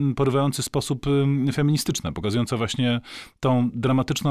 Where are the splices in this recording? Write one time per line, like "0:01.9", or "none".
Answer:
none